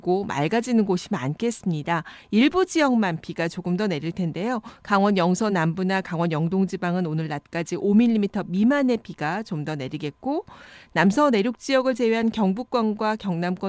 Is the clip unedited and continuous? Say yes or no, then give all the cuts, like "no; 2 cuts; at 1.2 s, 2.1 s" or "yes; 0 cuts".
yes; 0 cuts